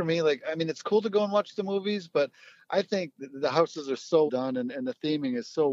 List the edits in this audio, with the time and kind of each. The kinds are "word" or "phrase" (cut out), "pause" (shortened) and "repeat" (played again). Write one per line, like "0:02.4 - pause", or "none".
0:04.3 - word

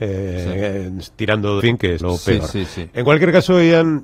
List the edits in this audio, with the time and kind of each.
0:01.6 - phrase
0:02.0 - word

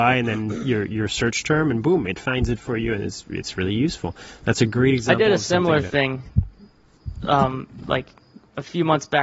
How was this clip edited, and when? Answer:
none

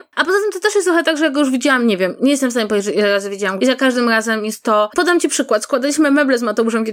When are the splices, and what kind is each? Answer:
0:03.6 - word

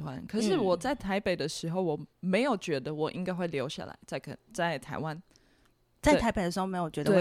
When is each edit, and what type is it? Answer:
none

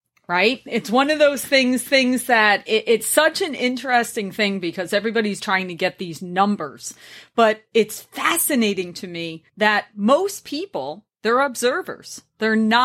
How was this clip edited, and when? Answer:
0:01.9 - repeat
0:05.4 - word
0:09.5 - pause
0:11.1 - pause

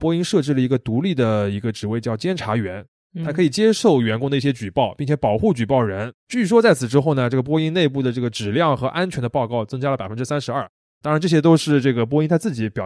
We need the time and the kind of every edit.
0:06.2 - pause
0:10.8 - pause

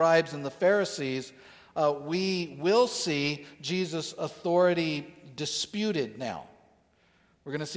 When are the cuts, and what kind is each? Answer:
none

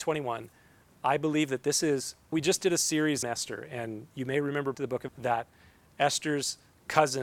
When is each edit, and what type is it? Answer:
0:02.3 - word
0:03.2 - word
0:04.7 - word
0:05.1 - word

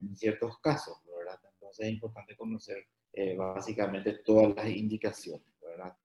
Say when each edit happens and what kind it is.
none

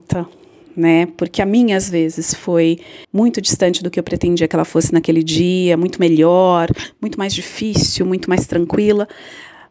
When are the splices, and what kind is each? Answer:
0:03.0 - pause

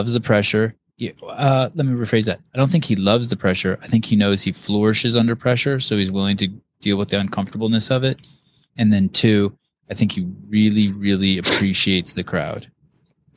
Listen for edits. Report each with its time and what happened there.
none

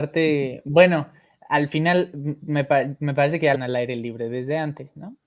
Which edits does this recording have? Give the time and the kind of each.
0:03.5 - phrase

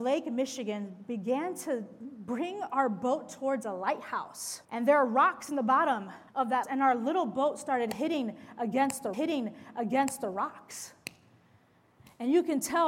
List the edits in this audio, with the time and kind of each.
0:04.6 - pause
0:06.3 - pause
0:06.6 - word
0:09.1 - repeat

